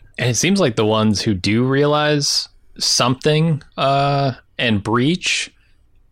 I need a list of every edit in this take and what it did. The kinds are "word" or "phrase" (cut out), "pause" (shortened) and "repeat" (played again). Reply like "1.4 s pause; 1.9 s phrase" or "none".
3.7 s pause